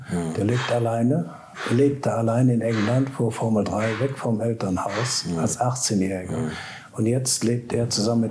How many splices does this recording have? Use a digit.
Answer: 0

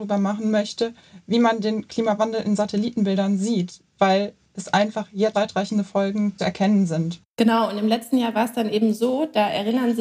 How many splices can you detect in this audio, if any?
2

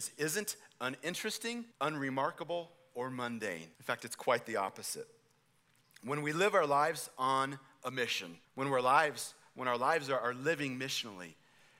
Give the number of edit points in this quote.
3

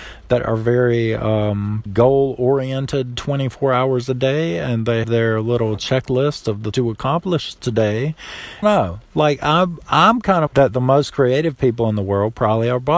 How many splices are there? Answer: 5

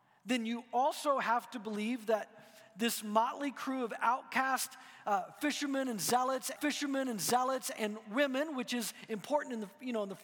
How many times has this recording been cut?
1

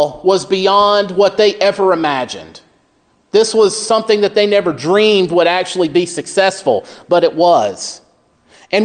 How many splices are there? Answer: 0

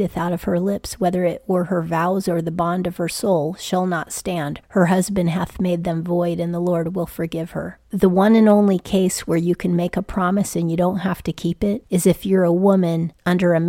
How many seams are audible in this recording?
1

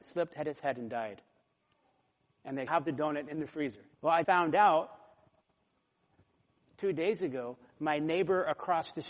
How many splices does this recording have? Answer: 3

